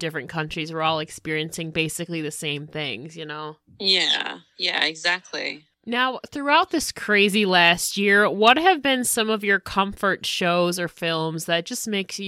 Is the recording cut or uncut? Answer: uncut